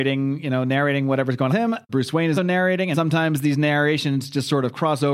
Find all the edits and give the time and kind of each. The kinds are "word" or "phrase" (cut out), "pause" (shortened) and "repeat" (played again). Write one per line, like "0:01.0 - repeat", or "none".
0:01.5 - phrase
0:01.9 - word
0:02.4 - word
0:02.9 - word

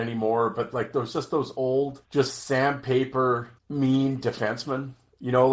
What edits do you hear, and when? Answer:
0:02.0 - pause
0:03.6 - pause

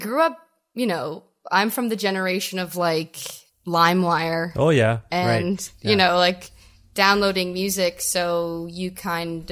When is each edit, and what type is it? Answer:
none

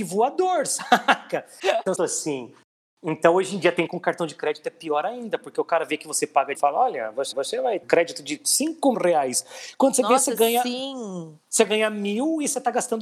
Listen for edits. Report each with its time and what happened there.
0:02.0 - phrase
0:03.9 - phrase
0:06.5 - phrase
0:07.3 - repeat
0:07.8 - word
0:08.9 - word

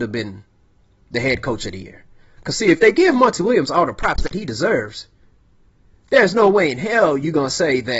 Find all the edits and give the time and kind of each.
none

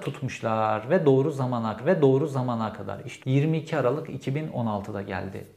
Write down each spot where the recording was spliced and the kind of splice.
0:01.8 - repeat
0:03.2 - phrase

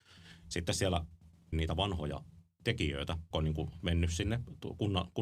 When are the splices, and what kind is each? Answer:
0:01.5 - phrase
0:03.3 - word

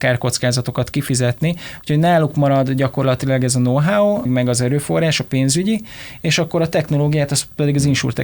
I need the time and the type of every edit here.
0:04.2 - word

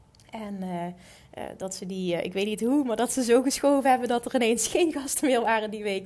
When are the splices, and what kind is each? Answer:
none

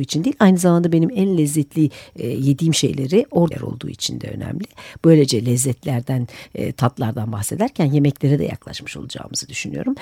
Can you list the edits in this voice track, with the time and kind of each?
0:03.5 - phrase

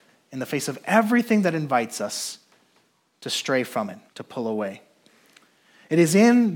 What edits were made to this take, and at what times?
0:04.1 - pause

